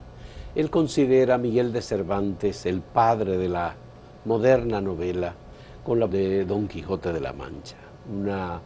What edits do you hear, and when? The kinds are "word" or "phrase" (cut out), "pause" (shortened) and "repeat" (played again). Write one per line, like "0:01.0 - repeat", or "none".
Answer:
0:06.1 - word